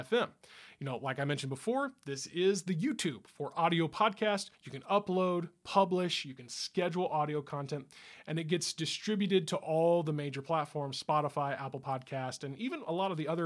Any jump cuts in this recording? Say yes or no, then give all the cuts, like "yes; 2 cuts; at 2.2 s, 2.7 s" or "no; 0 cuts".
yes; 1 cut; at 4.5 s